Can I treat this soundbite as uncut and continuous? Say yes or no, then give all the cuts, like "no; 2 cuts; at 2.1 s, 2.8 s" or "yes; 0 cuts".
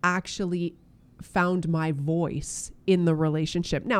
yes; 0 cuts